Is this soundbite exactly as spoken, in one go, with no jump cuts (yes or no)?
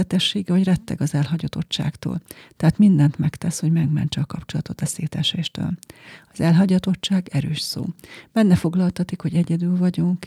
yes